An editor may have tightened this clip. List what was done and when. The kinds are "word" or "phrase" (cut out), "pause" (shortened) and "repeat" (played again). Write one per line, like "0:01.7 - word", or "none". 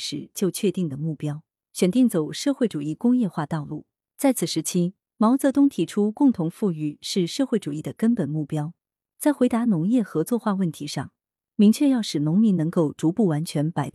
none